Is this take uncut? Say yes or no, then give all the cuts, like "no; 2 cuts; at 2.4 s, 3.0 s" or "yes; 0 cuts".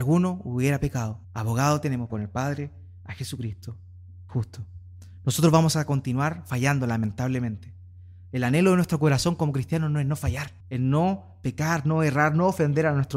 no; 4 cuts; at 1.2 s, 2.1 s, 4.3 s, 10.6 s